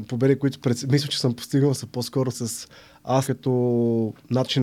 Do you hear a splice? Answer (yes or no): yes